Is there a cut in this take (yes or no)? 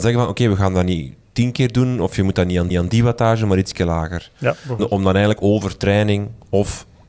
yes